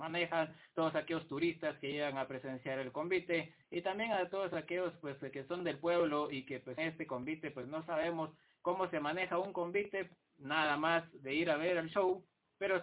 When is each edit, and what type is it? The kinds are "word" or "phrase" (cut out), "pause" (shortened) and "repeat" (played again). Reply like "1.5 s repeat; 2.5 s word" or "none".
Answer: 6.8 s word